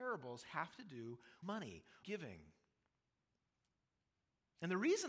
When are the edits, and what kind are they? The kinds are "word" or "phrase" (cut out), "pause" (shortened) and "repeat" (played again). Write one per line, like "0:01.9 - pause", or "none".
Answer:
0:01.4 - word
0:02.0 - phrase